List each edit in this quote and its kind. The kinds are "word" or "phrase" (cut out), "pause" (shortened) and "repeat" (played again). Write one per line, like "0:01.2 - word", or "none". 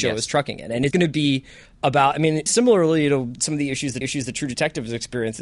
0:00.9 - word
0:02.5 - word
0:03.3 - word
0:04.0 - repeat